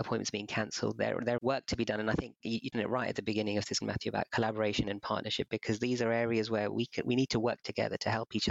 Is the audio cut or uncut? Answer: cut